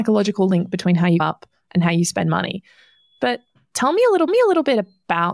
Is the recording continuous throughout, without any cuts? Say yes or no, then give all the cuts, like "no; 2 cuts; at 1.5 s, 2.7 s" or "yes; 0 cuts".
no; 2 cuts; at 1.2 s, 4.3 s